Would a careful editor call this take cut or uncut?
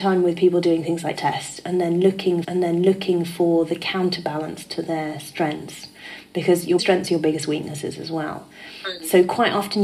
cut